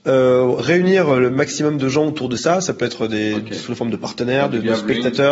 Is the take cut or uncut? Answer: uncut